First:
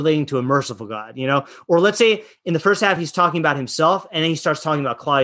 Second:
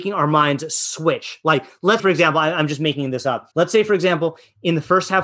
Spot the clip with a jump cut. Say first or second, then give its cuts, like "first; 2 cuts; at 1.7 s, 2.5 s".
second; 2 cuts; at 2.0 s, 3.5 s